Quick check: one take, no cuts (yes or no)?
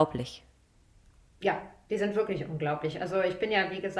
yes